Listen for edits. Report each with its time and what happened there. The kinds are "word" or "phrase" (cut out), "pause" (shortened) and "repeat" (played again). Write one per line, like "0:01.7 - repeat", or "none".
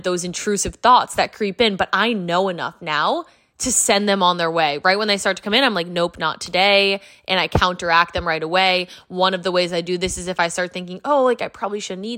none